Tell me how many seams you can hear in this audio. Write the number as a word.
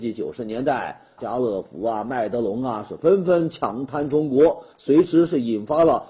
one